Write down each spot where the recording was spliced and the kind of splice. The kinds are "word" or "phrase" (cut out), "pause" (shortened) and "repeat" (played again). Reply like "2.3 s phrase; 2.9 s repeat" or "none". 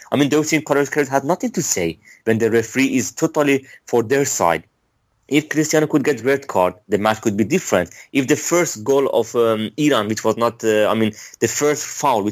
none

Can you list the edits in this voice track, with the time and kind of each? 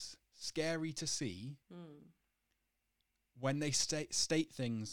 1.6 s pause

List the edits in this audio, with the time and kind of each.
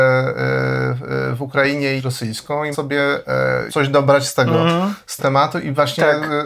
2.0 s phrase; 2.7 s word; 3.7 s word; 5.2 s word

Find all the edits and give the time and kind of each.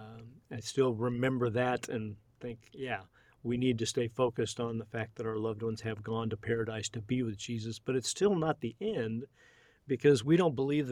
none

